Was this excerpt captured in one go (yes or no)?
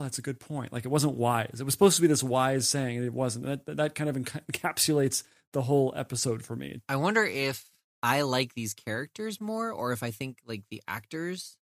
yes